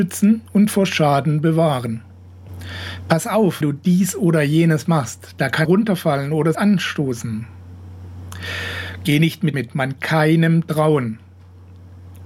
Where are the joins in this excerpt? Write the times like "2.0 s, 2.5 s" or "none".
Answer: 3.6 s, 5.6 s, 6.5 s, 9.5 s, 10.0 s